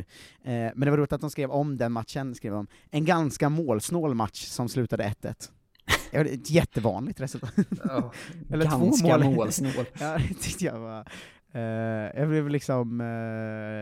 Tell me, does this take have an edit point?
no; 0 cuts

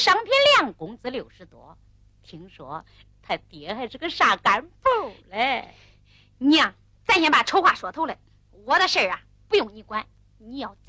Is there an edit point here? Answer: no; 0 cuts

